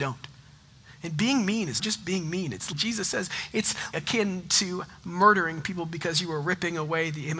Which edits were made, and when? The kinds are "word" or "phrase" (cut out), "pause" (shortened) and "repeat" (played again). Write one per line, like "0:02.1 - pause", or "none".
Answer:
0:01.8 - word
0:02.7 - word
0:03.9 - word